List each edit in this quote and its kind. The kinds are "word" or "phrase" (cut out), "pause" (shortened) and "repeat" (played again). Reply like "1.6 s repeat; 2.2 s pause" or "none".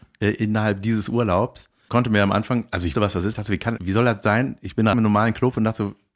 1.9 s word; 2.9 s word; 3.3 s word; 3.8 s word; 4.9 s word